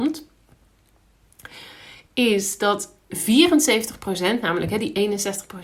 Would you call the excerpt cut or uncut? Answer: cut